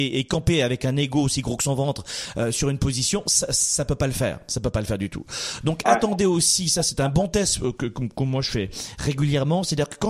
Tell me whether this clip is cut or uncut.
uncut